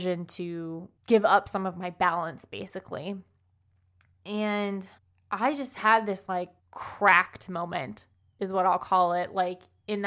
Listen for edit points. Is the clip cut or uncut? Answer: cut